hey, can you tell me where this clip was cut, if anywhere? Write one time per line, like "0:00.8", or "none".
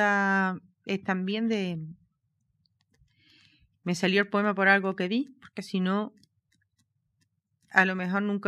none